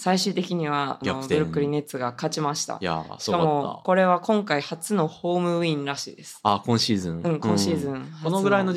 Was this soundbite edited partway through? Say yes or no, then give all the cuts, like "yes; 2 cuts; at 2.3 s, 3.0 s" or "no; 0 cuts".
yes; 1 cut; at 1.0 s